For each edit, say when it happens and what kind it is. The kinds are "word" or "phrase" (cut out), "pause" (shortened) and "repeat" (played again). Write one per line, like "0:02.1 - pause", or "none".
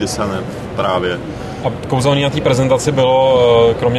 none